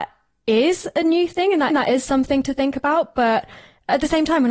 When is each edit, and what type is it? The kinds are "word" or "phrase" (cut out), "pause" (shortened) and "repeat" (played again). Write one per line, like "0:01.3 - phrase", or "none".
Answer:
0:01.7 - repeat